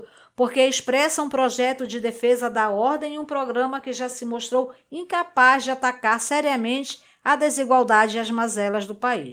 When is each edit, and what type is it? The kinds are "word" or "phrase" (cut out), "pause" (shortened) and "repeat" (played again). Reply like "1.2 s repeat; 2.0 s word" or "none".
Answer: none